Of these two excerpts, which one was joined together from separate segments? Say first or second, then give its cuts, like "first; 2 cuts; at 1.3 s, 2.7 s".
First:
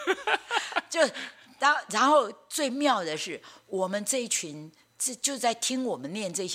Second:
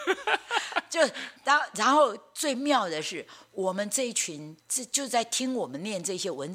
second; 2 cuts; at 1.4 s, 4.6 s